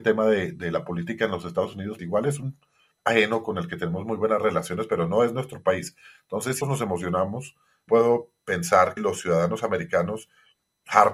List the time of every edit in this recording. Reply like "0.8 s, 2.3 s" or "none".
2.0 s, 2.9 s, 6.6 s, 7.9 s, 9.0 s

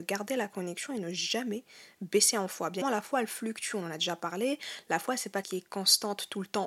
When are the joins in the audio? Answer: 2.8 s, 5.4 s

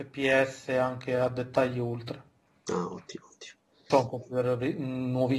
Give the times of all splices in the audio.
3.9 s

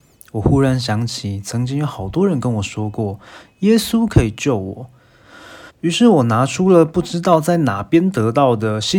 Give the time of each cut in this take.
5.7 s

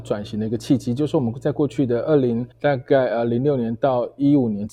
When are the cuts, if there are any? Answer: 2.5 s

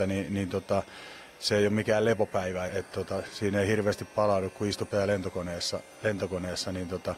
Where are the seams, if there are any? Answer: 2.7 s, 4.9 s, 5.9 s

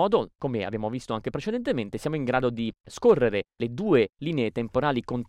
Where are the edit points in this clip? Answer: none

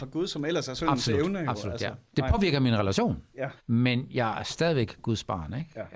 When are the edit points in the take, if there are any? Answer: 3.6 s

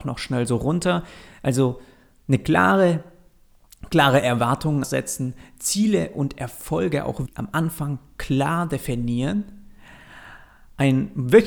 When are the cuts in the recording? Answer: 4.8 s, 7.3 s

